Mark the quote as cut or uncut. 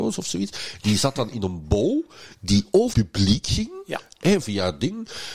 cut